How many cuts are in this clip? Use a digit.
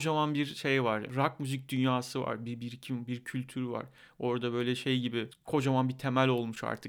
0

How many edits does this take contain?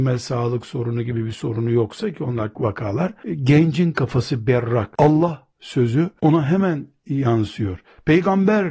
1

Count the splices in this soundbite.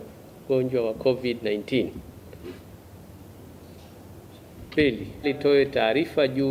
1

